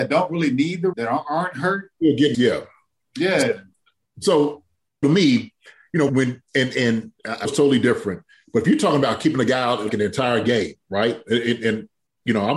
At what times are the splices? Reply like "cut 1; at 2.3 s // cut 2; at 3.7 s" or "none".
cut 1; at 0.9 s // cut 2; at 2.3 s // cut 3; at 5.0 s // cut 4; at 6.1 s // cut 5; at 7.4 s // cut 6; at 9.9 s

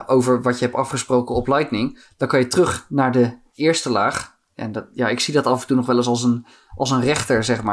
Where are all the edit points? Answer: none

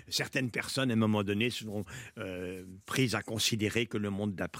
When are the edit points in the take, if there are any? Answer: none

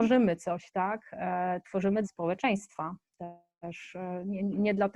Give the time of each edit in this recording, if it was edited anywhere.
cut 1; at 2.0 s

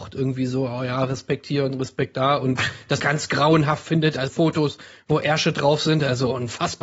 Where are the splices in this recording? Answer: cut 1; at 3.0 s // cut 2; at 4.3 s

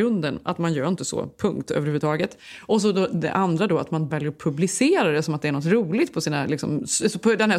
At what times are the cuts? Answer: cut 1; at 4.1 s

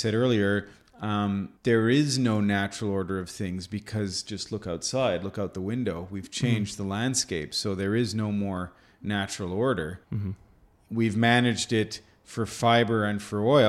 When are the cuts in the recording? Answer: cut 1; at 1.6 s // cut 2; at 10.0 s

